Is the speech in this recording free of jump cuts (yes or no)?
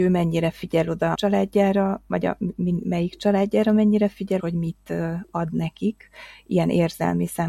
no